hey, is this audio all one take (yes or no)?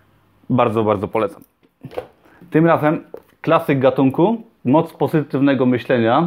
yes